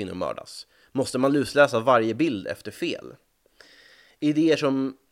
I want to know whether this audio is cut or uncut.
uncut